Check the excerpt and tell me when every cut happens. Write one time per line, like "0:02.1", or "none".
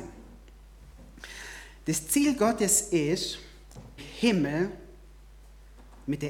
0:04.0